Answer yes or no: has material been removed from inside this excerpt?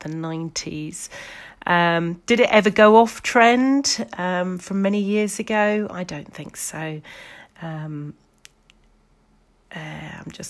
no